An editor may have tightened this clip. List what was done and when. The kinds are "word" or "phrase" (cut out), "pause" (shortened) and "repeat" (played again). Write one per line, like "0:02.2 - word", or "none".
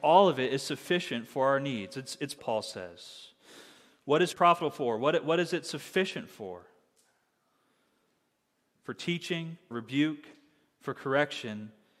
0:02.4 - word
0:04.3 - word
0:09.7 - word

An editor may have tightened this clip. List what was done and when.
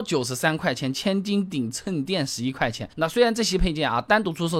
0:02.9 - pause

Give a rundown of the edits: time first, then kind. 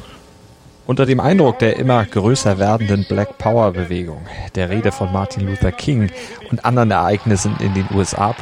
none

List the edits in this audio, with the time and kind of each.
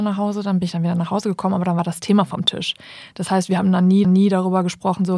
0:04.0 - repeat

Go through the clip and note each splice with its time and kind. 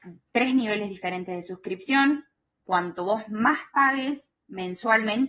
none

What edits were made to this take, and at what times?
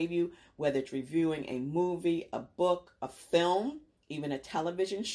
none

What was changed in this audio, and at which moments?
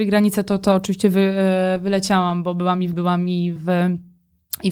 0:02.9 - word
0:03.6 - word

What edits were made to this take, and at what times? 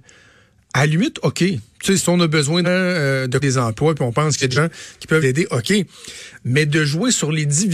0:02.0 - word
0:02.6 - word
0:03.4 - word
0:04.5 - word
0:05.2 - word

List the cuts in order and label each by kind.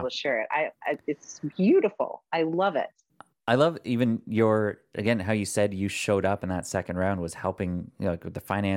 none

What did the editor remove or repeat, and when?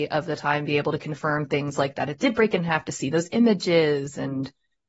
none

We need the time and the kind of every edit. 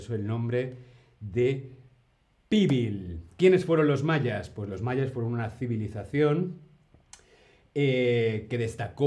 none

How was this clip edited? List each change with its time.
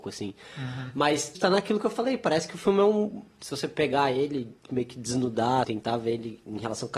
0:01.4 - phrase
0:05.6 - word

